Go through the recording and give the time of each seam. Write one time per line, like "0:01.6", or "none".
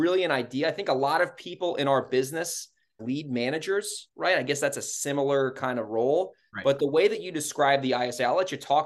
0:03.0